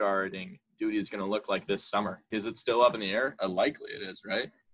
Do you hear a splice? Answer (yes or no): yes